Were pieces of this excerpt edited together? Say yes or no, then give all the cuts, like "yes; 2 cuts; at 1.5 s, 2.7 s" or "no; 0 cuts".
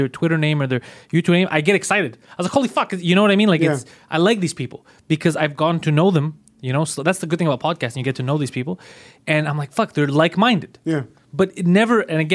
no; 0 cuts